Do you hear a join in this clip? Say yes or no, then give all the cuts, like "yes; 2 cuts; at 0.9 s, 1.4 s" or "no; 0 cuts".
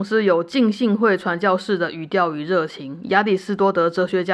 no; 0 cuts